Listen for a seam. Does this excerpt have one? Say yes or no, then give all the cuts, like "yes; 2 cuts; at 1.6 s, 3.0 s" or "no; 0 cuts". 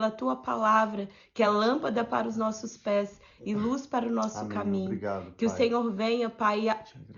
no; 0 cuts